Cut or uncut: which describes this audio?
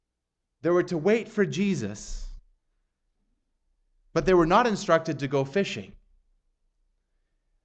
uncut